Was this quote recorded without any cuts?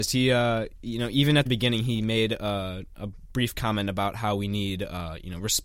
no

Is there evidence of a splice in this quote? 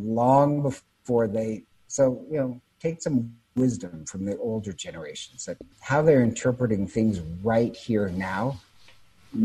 yes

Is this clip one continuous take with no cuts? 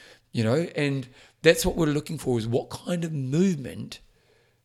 yes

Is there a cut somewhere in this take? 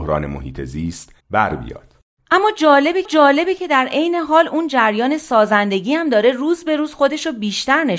yes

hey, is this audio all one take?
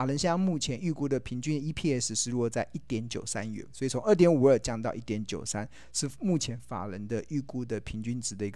yes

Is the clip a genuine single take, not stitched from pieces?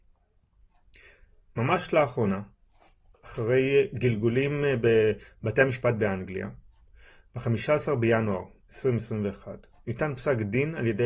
yes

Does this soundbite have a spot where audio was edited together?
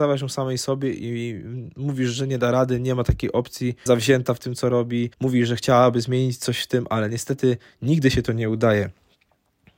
yes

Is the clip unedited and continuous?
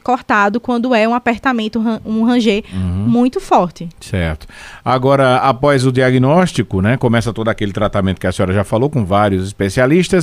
yes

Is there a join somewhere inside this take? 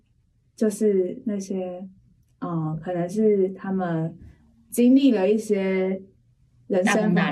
no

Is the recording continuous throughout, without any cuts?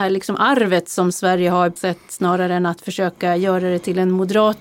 no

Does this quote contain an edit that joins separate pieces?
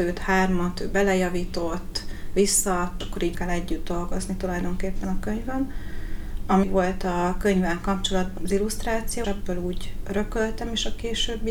yes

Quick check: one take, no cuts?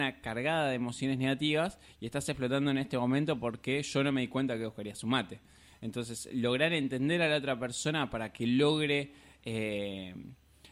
yes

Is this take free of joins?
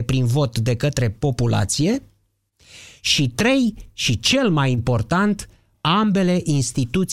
yes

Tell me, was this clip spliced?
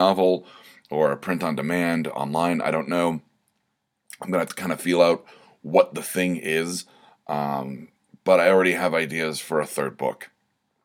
no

